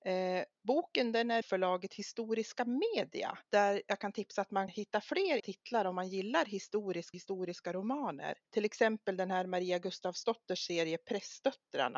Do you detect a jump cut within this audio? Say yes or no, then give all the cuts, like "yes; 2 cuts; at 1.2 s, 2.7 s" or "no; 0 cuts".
yes; 6 cuts; at 1.4 s, 3.4 s, 4.7 s, 5.4 s, 7.1 s, 8.5 s